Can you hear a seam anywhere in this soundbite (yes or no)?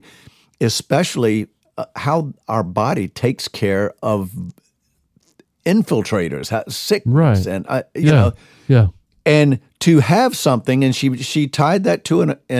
yes